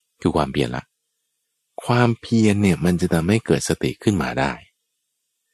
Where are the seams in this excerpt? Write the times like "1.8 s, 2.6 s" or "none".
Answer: none